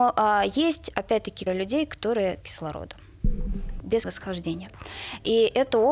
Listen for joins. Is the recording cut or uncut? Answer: cut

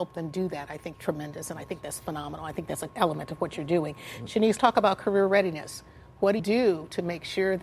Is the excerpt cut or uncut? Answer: cut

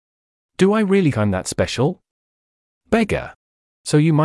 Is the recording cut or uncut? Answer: cut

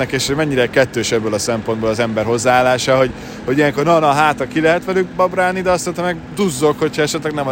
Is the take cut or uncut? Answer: uncut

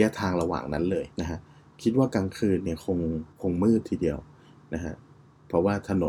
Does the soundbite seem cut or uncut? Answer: cut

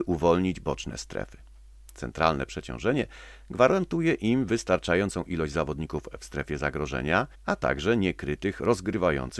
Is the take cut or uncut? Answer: cut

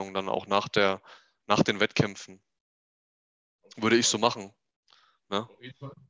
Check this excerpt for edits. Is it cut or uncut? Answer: uncut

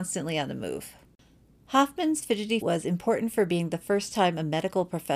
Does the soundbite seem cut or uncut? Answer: cut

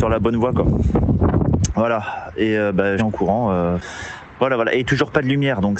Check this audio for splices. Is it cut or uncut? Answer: cut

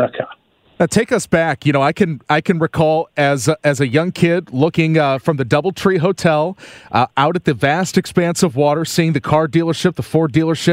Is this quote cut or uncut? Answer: uncut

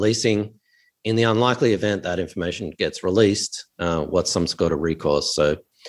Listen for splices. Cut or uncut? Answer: uncut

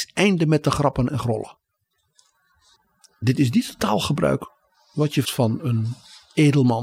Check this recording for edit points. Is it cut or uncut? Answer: cut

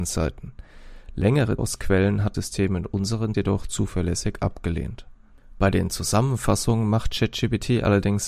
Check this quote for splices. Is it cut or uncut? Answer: cut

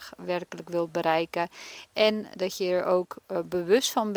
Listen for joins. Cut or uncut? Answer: uncut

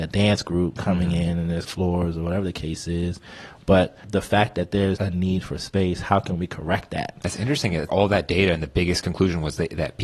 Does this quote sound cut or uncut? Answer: cut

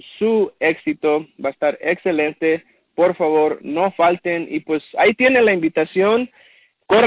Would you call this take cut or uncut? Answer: uncut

